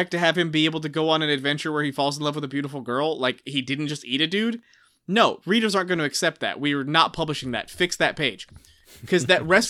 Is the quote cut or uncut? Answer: uncut